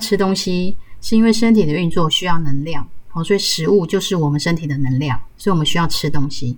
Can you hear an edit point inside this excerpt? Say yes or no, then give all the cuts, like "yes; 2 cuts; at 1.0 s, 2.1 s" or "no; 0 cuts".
no; 0 cuts